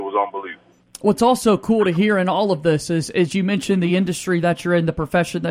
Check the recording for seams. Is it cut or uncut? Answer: uncut